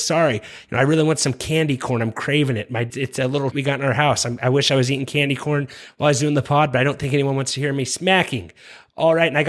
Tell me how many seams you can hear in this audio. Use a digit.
2